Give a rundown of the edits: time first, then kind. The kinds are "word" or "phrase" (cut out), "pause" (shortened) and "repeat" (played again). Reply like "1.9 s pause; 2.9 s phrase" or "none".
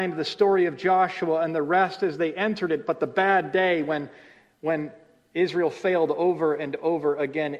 none